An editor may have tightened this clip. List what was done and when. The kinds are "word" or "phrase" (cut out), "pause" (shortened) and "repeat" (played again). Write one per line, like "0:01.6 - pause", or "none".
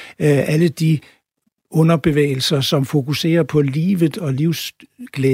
none